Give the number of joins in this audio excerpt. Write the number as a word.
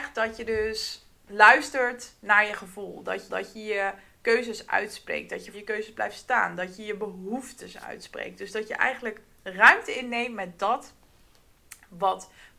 two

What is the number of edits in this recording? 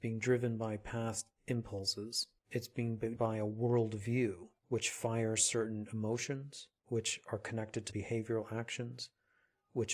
five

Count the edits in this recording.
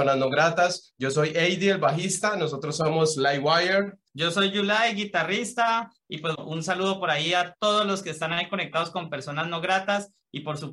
two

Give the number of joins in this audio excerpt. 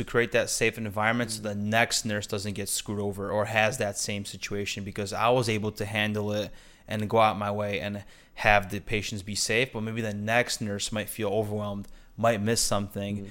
zero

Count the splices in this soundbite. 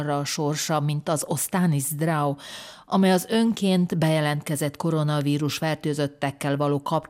zero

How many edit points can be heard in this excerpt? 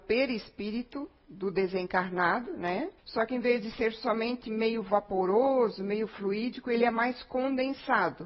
one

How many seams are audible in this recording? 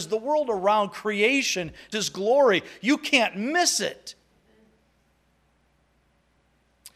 one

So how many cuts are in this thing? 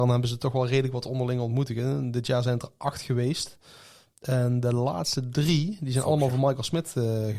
zero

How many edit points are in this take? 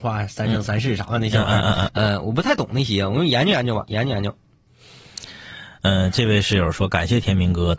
one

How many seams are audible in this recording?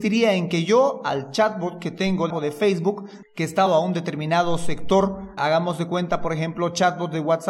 three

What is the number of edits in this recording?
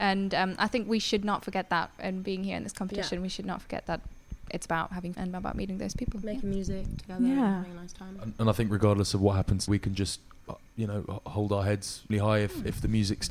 three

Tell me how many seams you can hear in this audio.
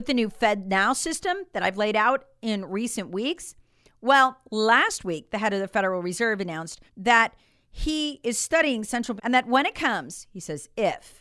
two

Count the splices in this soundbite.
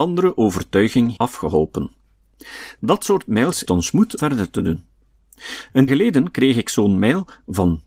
four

